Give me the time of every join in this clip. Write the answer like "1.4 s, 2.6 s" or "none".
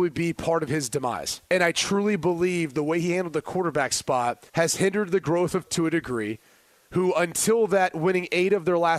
1.5 s, 4.5 s, 5.7 s